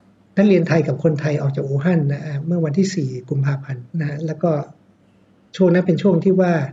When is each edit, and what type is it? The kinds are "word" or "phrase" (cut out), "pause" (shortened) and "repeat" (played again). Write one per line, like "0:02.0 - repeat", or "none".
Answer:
0:03.9 - pause